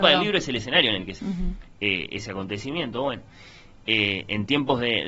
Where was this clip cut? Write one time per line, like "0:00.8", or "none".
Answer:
0:01.2